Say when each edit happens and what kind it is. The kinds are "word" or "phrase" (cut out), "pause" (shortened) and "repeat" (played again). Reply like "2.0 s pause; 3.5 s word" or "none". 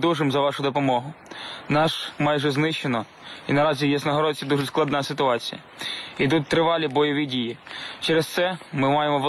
2.2 s word